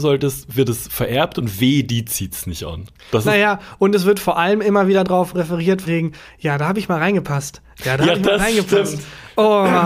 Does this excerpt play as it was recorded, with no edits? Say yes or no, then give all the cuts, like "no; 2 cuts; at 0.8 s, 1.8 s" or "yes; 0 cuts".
no; 1 cut; at 5.8 s